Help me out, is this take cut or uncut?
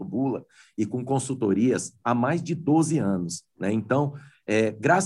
uncut